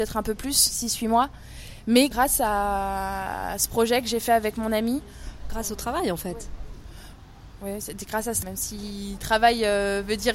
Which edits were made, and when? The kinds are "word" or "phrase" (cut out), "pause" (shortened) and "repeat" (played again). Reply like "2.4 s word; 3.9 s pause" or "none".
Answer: 8.4 s word